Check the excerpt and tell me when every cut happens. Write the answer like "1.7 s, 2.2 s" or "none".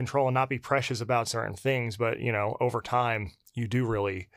none